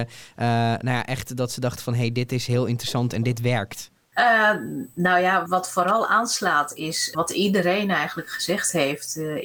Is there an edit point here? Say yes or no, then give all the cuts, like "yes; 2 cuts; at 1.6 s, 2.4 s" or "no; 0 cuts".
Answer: yes; 2 cuts; at 5.5 s, 7.1 s